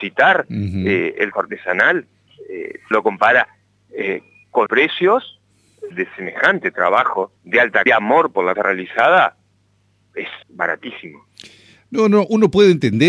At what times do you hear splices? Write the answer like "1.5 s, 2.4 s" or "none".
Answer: 1.3 s, 2.9 s, 4.7 s, 5.9 s, 7.4 s, 7.9 s, 8.6 s, 10.4 s